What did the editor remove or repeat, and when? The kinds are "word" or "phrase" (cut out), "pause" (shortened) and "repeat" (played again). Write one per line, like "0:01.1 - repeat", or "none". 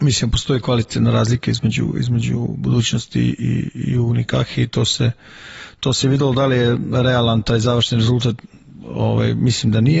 none